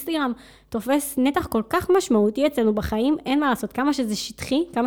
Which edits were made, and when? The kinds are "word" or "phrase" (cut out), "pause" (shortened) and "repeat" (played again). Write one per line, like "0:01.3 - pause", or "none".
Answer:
none